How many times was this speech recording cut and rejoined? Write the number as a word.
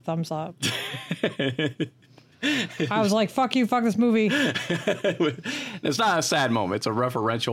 zero